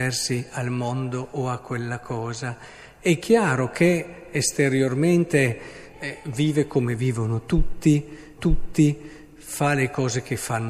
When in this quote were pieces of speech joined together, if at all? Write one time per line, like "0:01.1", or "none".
0:08.4